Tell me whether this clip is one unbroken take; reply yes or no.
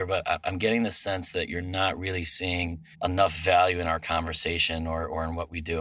no